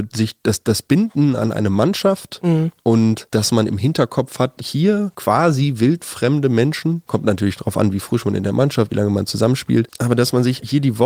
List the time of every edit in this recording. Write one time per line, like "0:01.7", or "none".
0:04.6
0:08.9

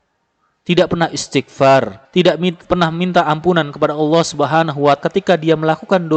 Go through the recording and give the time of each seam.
0:02.0
0:05.0

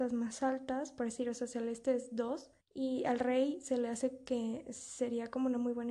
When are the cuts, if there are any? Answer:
0:02.6

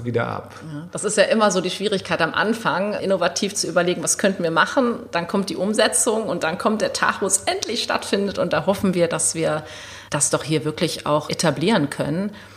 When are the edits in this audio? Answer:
0:03.0
0:10.1
0:11.3

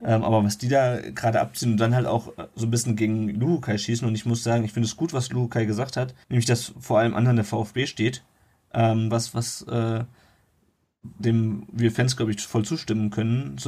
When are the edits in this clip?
0:06.2
0:06.7
0:09.1
0:11.2

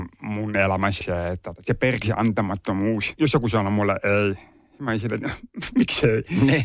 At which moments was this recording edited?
0:01.0
0:01.6

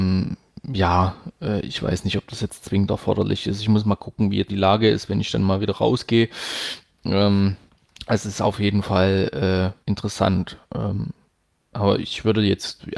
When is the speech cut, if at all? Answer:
0:04.5
0:07.7
0:09.8

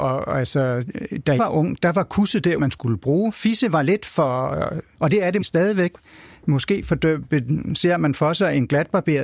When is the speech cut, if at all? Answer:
0:01.4
0:02.6
0:04.9
0:05.4

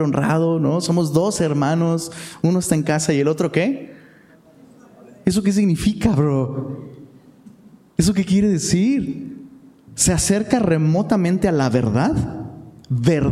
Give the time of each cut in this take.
none

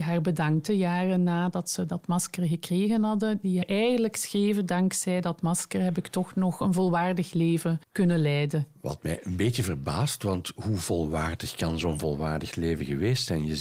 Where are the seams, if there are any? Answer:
0:03.6
0:07.8

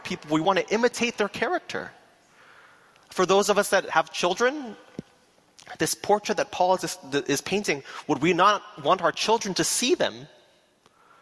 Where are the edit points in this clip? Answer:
none

